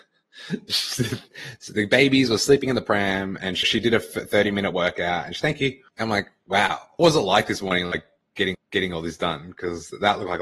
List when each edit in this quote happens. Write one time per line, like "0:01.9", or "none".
0:03.6
0:05.4
0:05.9
0:07.0
0:08.5